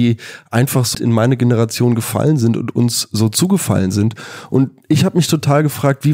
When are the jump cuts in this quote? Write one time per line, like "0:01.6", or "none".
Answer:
0:00.9